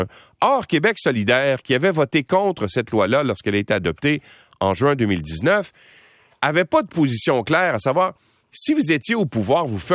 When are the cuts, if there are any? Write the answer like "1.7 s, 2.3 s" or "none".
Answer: none